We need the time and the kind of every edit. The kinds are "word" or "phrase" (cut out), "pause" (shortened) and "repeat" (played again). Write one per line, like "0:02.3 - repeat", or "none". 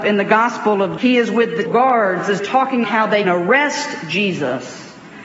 0:01.0 - word
0:01.7 - word
0:02.4 - word
0:02.8 - word
0:03.2 - word

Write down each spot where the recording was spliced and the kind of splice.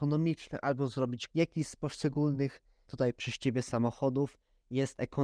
0:01.3 - word
0:02.8 - word

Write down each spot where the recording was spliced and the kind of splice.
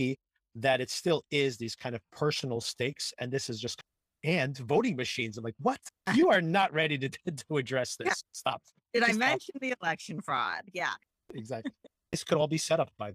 none

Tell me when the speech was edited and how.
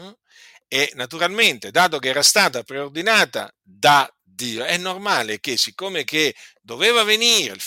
none

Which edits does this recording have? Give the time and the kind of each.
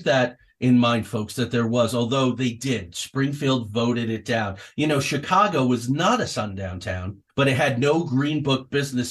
0:07.3 - pause

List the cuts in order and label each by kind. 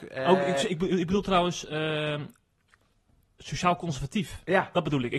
none

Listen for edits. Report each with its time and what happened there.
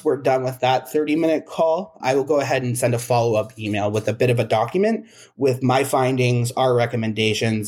0:02.0 - word

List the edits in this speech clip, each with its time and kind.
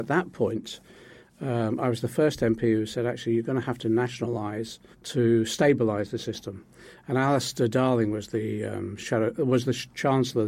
0:04.9 - pause

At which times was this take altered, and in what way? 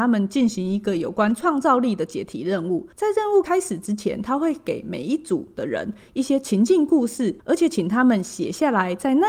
0:02.9 - pause
0:07.4 - pause

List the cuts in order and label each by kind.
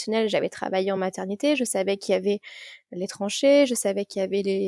none

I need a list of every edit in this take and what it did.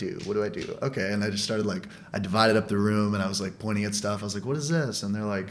none

